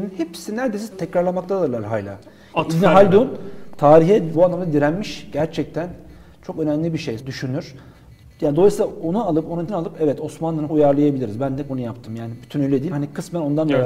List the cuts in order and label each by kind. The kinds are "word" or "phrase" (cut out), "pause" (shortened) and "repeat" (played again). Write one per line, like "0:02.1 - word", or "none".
0:00.9 - word
0:04.3 - word
0:07.2 - word
0:09.7 - word
0:10.7 - word
0:11.7 - word
0:12.9 - word